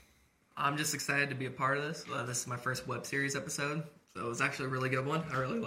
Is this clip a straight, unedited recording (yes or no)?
yes